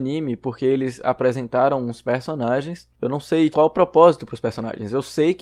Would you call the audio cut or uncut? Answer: cut